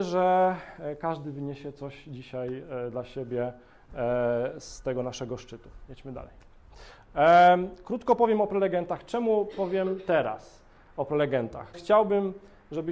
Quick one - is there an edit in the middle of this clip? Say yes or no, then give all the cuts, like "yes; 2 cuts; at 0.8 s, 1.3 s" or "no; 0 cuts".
yes; 1 cut; at 11.7 s